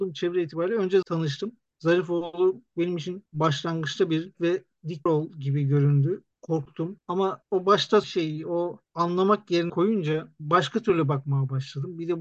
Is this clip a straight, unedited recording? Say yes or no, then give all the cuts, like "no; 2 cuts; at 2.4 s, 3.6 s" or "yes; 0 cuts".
no; 5 cuts; at 1.0 s, 4.3 s, 5.1 s, 8.0 s, 9.7 s